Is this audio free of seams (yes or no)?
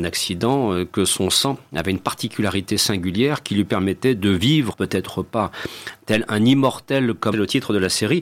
no